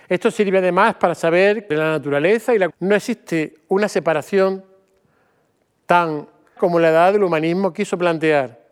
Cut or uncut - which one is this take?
cut